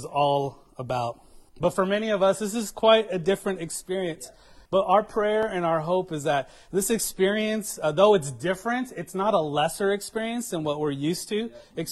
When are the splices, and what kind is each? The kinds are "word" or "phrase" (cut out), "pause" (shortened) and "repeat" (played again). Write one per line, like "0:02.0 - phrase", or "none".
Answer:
0:01.5 - pause
0:04.7 - pause

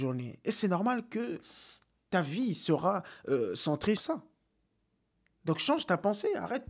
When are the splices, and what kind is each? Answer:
0:04.0 - phrase

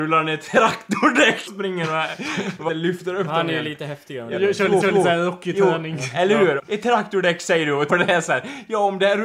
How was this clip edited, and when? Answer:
0:01.5 - word
0:02.7 - word
0:04.8 - repeat
0:06.6 - phrase
0:07.9 - phrase

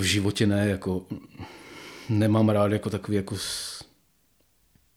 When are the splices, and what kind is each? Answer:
none

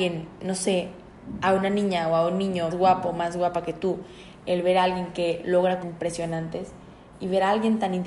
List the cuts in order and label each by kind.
0:02.7 - word
0:05.8 - phrase

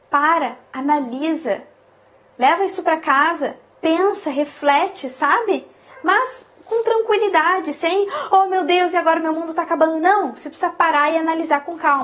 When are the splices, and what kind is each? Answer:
none

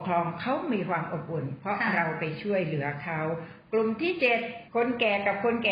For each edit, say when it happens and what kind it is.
0:04.7 - pause

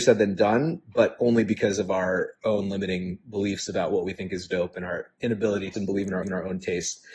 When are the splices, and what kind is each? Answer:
0:05.7 - phrase
0:06.2 - repeat

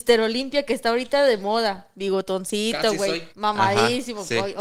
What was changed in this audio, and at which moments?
0:03.3 - pause

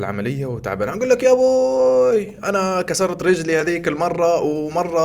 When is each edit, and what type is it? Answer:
none

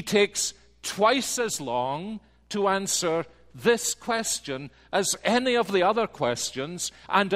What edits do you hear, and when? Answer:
none

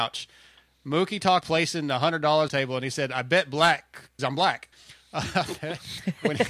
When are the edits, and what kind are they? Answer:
0:01.4 - word
0:02.5 - phrase
0:04.2 - word
0:04.7 - pause

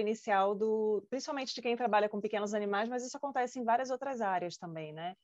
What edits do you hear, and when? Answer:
none

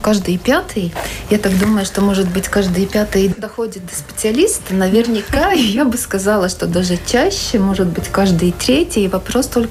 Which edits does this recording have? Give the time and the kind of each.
none

